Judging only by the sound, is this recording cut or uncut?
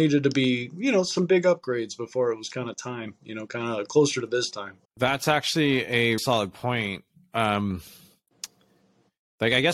cut